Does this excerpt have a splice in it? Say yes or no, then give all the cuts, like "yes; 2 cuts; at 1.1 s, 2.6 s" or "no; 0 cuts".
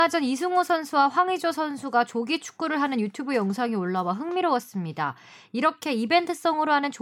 no; 0 cuts